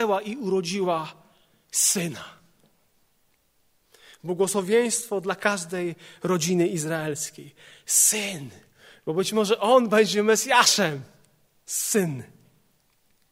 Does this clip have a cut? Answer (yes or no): no